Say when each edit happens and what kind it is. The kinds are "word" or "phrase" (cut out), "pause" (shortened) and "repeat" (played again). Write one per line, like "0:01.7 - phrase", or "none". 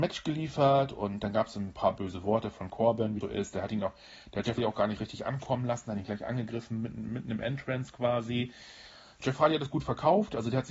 0:03.2 - word
0:04.6 - word
0:05.0 - word